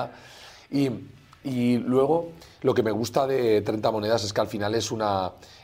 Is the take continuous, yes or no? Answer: yes